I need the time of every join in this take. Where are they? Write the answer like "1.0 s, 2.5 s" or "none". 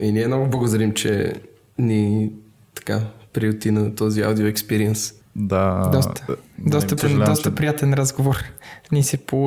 7.0 s